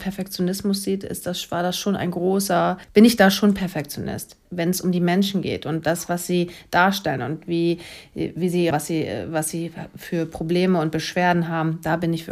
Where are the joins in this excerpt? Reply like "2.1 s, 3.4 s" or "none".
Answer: 2.8 s, 4.4 s, 8.7 s